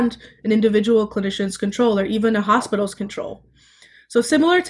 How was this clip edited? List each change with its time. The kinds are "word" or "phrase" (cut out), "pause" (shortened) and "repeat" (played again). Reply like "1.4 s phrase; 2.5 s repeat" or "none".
none